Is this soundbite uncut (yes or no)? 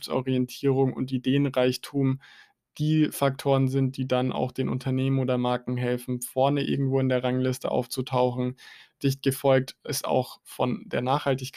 yes